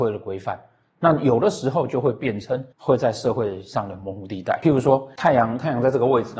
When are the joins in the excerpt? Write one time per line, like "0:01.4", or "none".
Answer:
0:02.7